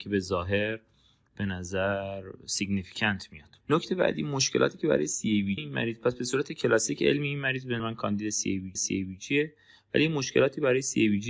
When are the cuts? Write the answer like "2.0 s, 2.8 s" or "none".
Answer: 3.6 s, 5.6 s, 7.8 s, 8.8 s